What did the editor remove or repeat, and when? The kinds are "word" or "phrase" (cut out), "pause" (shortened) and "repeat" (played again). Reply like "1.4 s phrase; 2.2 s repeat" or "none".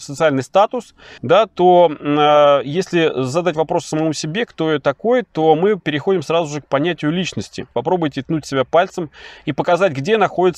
1.2 s pause; 7.7 s pause